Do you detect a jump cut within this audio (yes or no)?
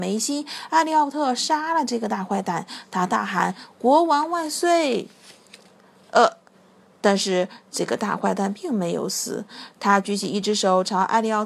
no